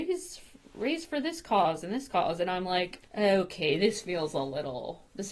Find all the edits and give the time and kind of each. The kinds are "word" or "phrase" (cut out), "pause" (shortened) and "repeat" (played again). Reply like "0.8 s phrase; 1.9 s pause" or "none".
3.1 s pause